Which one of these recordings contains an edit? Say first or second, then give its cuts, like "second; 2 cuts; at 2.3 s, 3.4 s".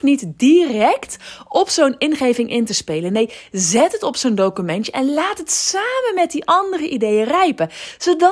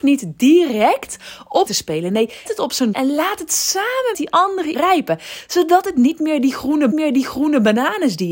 second; 6 cuts; at 1.7 s, 2.4 s, 2.9 s, 4.1 s, 4.7 s, 6.9 s